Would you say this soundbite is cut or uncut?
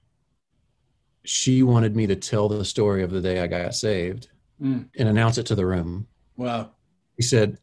cut